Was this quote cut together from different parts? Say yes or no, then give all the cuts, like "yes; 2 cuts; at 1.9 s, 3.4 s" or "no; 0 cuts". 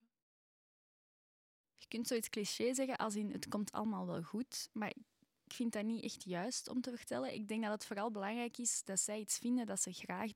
no; 0 cuts